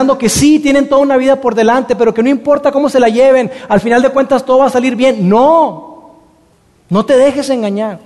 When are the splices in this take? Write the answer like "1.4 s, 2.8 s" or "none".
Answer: 6.5 s